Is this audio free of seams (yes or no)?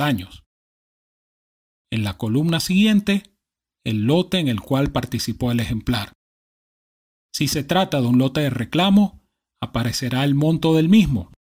yes